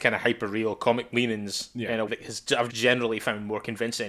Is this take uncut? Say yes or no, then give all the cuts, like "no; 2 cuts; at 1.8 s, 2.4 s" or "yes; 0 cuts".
no; 3 cuts; at 1.1 s, 2.1 s, 2.7 s